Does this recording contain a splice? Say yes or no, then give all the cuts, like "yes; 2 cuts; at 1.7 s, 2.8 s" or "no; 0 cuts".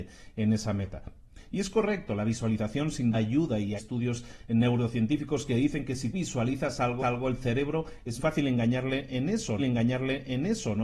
yes; 6 cuts; at 3.1 s, 3.8 s, 6.1 s, 7.0 s, 8.2 s, 9.6 s